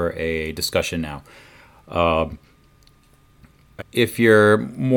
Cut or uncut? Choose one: cut